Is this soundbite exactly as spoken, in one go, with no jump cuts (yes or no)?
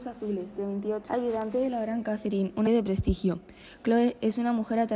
no